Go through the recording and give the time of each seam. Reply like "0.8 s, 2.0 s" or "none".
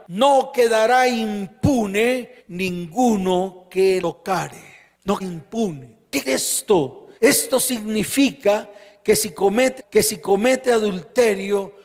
2.4 s, 4.0 s, 5.2 s, 6.2 s, 7.2 s, 9.8 s